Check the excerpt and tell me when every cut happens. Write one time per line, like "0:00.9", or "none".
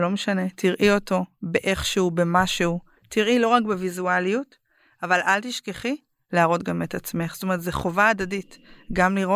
none